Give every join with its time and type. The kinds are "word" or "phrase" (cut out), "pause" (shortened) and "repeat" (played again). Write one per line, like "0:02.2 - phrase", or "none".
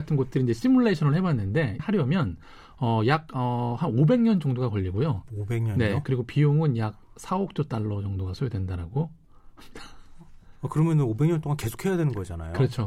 0:01.8 - word